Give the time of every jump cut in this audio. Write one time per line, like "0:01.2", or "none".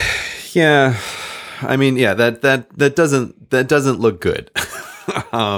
none